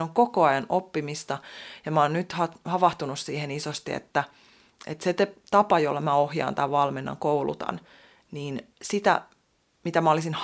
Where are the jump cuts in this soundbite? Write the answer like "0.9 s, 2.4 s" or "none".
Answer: 8.7 s